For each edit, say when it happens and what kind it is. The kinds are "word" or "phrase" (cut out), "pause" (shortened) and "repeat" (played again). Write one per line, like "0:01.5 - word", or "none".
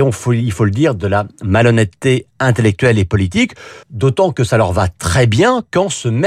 0:03.8 - pause